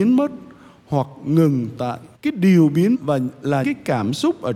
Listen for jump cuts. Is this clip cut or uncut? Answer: cut